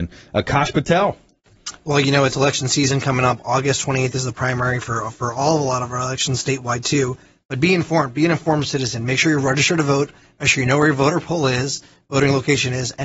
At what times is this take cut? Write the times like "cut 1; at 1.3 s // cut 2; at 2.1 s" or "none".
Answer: none